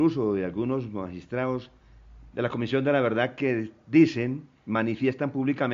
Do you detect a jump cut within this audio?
no; 0 cuts

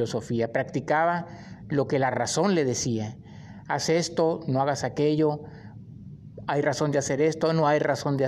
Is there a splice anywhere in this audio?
no; 0 cuts

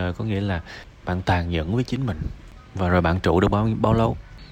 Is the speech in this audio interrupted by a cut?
no; 0 cuts

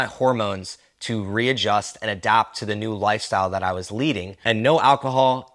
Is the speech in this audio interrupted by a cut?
no; 0 cuts

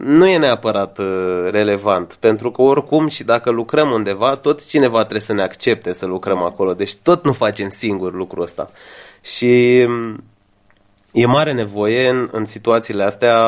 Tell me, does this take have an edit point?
no; 0 cuts

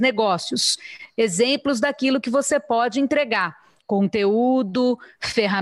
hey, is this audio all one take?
yes; 0 cuts

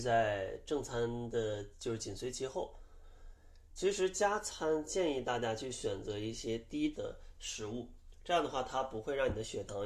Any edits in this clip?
yes; 1 cut; at 6.9 s

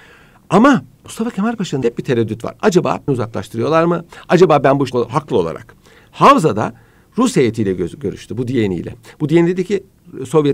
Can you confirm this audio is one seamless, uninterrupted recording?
no; 3 cuts; at 1.8 s, 3.1 s, 4.9 s

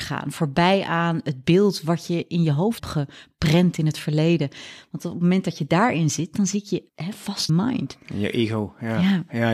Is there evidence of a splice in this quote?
yes; 3 cuts; at 2.8 s, 6.9 s, 7.5 s

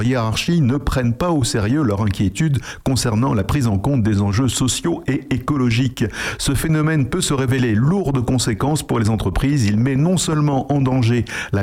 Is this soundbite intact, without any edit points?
yes; 0 cuts

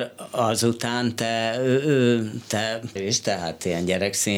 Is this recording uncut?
no; 1 cut; at 3.0 s

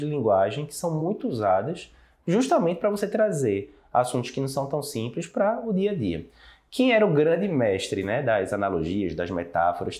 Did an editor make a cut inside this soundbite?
no; 0 cuts

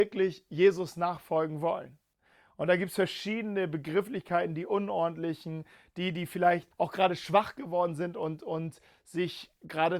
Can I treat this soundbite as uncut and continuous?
no; 1 cut; at 6.7 s

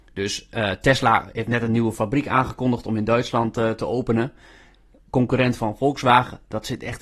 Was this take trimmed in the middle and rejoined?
no; 0 cuts

